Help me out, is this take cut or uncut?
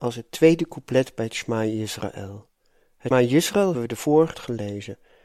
cut